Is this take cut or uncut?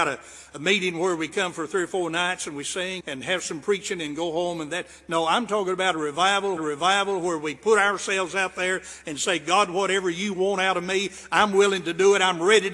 cut